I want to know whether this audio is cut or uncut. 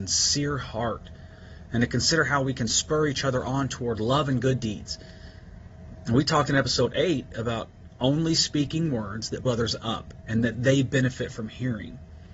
cut